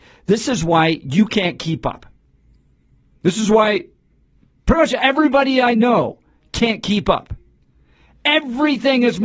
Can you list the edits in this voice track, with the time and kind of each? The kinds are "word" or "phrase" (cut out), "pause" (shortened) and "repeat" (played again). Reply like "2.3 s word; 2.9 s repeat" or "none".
none